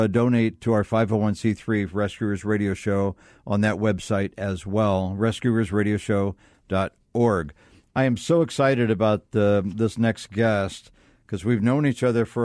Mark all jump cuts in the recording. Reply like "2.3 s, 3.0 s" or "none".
none